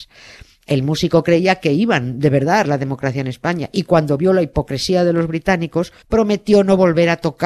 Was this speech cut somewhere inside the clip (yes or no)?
yes